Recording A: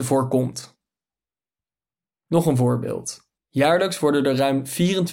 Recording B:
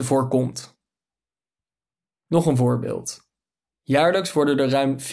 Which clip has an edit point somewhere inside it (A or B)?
A